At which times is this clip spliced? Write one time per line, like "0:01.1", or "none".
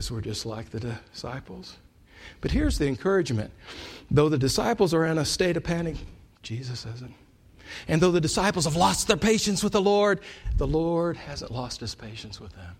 none